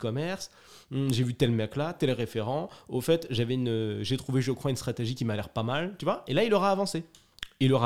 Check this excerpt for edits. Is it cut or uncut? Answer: uncut